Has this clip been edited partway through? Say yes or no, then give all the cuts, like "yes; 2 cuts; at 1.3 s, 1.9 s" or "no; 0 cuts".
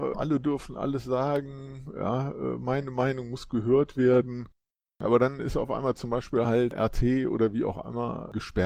no; 0 cuts